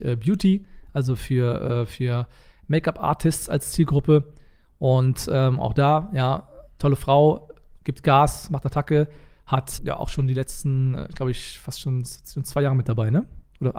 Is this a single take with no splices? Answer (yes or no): no